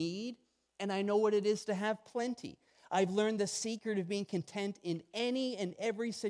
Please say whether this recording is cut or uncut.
uncut